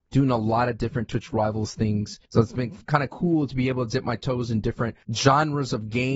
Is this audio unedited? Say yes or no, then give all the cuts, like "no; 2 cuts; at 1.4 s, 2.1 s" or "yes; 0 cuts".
no; 2 cuts; at 2.3 s, 5.0 s